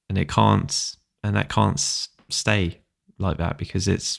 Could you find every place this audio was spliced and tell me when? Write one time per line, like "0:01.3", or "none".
none